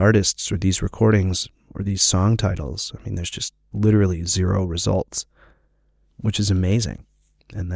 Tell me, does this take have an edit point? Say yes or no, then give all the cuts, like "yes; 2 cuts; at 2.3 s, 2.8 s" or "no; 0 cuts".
no; 0 cuts